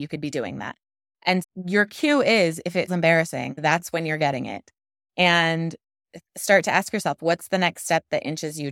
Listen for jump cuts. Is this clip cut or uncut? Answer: cut